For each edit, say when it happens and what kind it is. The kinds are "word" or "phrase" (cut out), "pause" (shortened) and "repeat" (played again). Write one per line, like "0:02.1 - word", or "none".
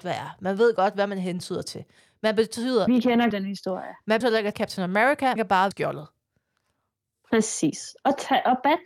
0:02.9 - word
0:03.3 - word
0:04.2 - word
0:04.5 - word
0:05.4 - word
0:05.7 - word